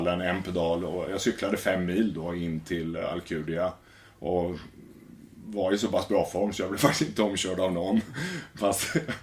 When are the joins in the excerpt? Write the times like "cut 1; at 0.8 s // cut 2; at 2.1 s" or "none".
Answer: none